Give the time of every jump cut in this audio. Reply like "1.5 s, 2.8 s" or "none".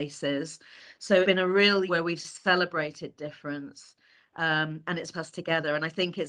1.2 s, 1.9 s, 5.1 s